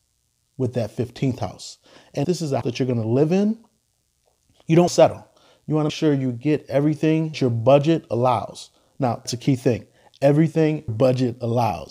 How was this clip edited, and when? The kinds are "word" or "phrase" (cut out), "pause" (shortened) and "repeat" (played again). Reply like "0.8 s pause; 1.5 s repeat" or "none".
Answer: 2.2 s word; 2.6 s word; 4.9 s word; 5.9 s word; 7.3 s word; 9.2 s word; 10.9 s word